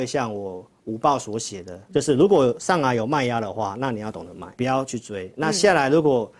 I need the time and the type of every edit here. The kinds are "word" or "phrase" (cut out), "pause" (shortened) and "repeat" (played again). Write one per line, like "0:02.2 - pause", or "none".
0:01.9 - word
0:04.5 - word